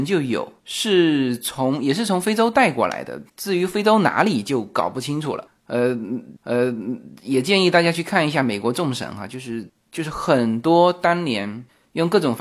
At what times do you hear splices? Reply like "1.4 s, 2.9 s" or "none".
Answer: 3.3 s, 6.4 s